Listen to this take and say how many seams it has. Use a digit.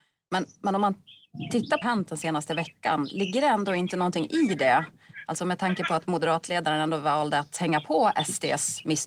1